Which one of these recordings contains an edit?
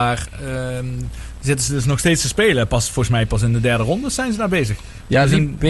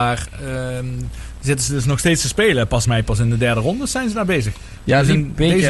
second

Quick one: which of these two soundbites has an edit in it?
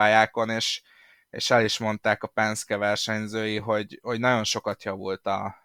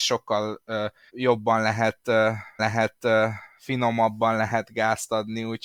second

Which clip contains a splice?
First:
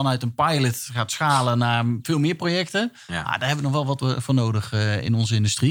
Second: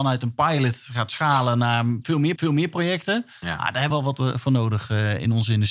second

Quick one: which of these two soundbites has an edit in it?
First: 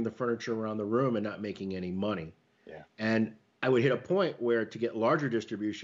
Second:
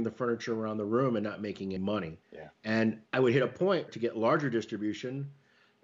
second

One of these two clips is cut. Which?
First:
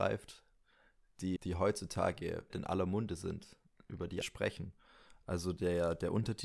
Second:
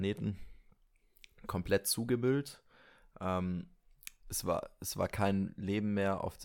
first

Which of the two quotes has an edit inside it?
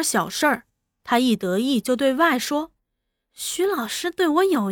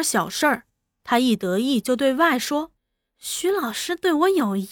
second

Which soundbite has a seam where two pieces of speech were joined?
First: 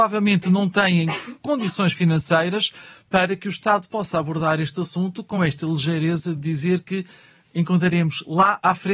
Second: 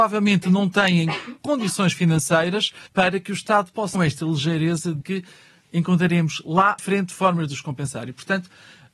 second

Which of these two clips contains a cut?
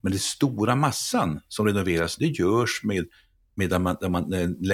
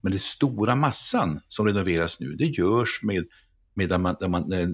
first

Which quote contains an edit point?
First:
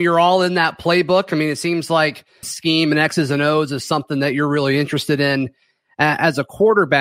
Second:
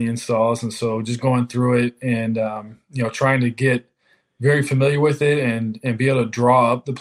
first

